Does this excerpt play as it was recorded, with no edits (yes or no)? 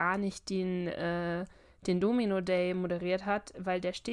yes